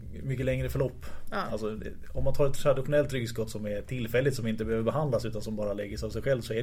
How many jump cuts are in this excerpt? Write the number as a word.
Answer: zero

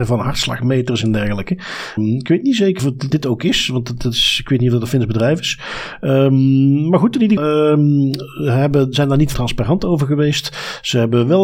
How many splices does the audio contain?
six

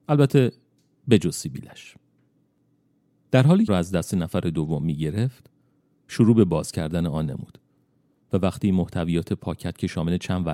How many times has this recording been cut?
one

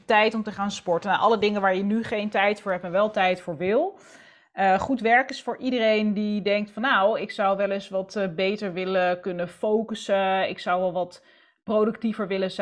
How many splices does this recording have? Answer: zero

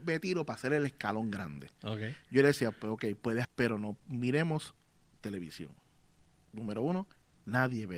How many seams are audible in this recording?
one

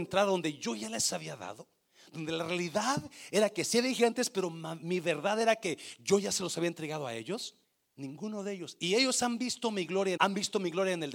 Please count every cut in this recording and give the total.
two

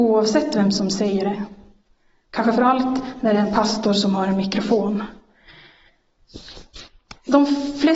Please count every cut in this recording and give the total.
one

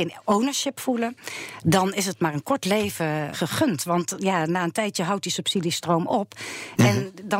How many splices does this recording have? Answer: one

